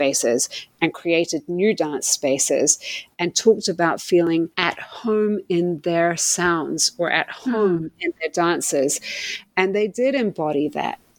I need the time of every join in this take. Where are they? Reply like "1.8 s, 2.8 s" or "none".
4.5 s